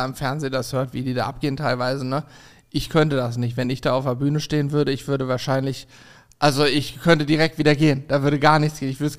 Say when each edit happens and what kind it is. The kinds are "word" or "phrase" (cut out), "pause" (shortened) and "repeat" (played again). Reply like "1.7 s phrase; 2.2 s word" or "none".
none